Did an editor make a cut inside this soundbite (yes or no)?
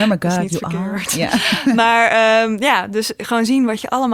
no